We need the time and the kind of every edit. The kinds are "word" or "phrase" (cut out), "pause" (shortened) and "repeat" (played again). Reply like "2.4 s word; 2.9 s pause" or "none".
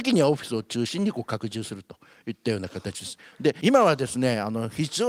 none